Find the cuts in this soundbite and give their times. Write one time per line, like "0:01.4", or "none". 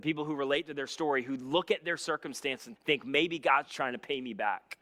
0:02.8